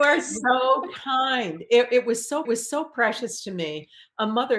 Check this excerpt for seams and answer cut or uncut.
cut